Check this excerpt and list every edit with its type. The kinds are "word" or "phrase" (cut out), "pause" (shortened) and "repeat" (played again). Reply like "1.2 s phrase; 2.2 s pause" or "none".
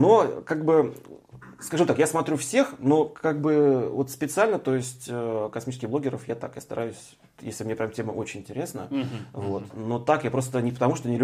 none